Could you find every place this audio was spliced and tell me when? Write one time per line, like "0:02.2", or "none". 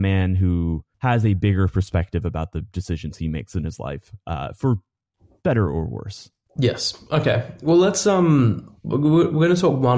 0:00.9